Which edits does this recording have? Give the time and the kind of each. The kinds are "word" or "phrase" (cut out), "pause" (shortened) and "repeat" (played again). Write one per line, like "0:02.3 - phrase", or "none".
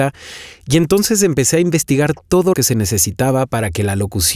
0:02.5 - word